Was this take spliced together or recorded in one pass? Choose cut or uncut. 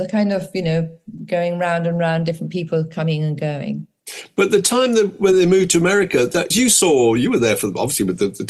cut